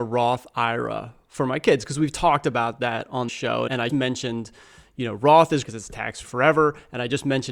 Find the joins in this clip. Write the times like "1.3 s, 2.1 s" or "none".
3.3 s, 3.9 s, 5.6 s, 6.2 s